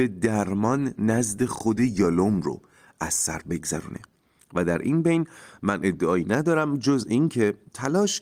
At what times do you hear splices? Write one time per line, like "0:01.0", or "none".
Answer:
none